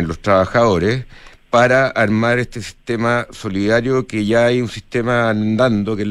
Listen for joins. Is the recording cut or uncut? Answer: uncut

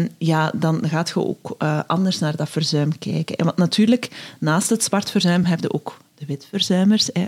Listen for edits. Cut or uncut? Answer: uncut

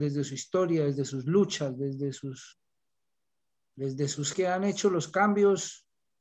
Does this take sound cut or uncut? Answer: cut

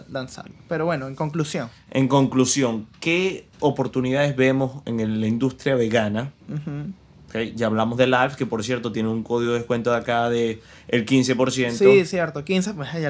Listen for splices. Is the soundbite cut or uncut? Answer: cut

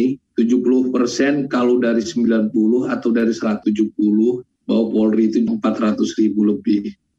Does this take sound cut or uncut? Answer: cut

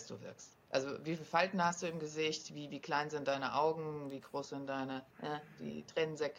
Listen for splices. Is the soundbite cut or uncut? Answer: cut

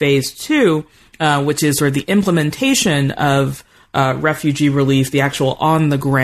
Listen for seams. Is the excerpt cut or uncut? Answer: uncut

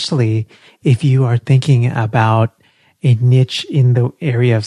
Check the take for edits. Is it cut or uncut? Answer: uncut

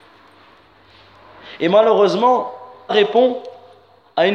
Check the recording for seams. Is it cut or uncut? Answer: cut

